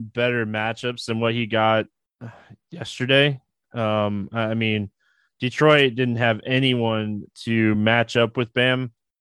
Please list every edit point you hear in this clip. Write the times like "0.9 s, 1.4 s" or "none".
none